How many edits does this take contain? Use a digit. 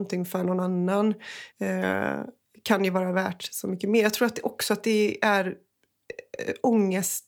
1